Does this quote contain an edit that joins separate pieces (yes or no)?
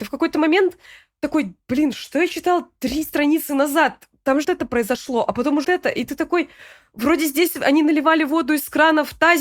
yes